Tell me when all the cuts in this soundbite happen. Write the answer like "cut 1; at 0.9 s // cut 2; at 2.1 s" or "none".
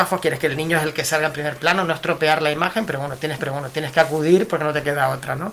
cut 1; at 3.4 s